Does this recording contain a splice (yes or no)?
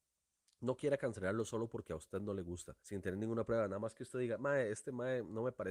yes